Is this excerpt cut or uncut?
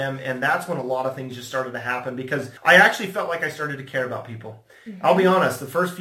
cut